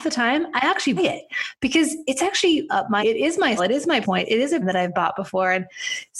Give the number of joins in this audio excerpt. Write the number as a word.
six